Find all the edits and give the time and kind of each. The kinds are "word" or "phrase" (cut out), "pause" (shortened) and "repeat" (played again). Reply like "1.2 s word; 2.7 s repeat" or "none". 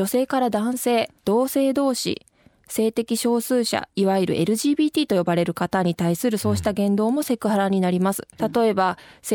1.2 s pause; 8.4 s phrase